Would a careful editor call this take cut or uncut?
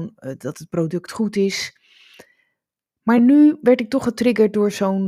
uncut